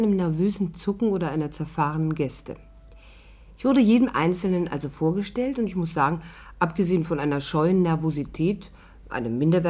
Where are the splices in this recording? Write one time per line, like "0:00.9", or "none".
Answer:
none